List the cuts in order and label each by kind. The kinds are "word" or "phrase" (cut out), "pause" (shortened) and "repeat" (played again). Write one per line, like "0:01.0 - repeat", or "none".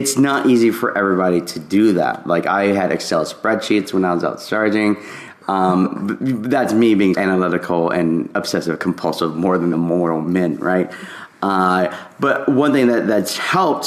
0:07.1 - word
0:09.7 - phrase